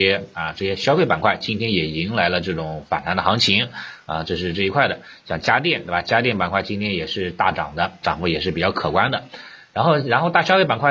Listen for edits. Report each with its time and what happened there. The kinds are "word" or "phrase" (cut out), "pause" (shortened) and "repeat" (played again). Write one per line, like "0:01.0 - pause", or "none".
0:08.0 - word